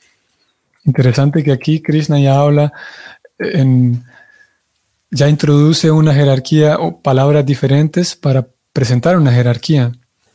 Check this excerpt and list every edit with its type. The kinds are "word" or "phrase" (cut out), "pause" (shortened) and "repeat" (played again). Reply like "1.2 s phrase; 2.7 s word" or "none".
none